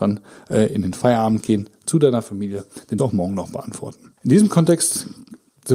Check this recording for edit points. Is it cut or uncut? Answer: cut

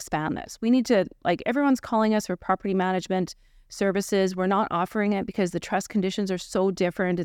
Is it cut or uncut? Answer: uncut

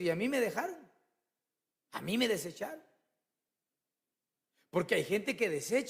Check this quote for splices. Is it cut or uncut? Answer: uncut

